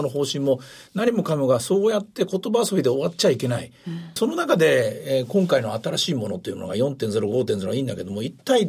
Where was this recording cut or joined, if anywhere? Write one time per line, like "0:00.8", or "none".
0:04.2